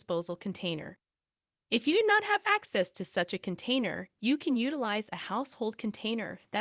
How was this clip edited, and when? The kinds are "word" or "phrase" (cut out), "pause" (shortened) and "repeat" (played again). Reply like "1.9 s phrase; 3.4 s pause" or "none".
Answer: none